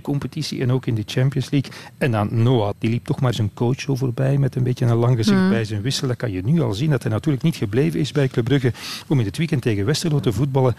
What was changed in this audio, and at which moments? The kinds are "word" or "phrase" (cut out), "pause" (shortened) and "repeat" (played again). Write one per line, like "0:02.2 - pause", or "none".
0:02.7 - word
0:03.3 - word